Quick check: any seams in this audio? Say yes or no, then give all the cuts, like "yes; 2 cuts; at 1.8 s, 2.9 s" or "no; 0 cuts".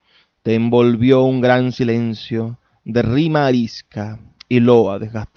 no; 0 cuts